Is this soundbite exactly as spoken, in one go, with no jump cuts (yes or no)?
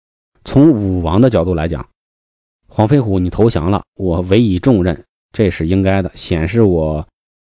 yes